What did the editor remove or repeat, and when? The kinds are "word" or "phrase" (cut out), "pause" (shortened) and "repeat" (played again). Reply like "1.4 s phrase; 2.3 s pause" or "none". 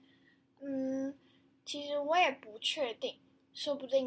none